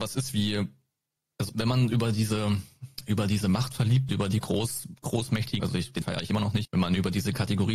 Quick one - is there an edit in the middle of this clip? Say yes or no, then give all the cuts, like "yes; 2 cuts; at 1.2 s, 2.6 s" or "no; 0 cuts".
yes; 5 cuts; at 1.5 s, 4.1 s, 5.6 s, 6.0 s, 6.6 s